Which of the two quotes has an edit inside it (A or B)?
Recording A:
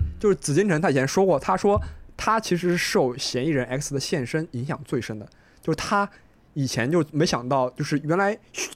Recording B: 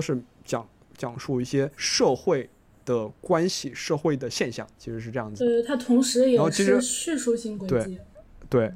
B